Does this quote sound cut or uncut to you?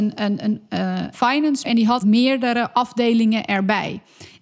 cut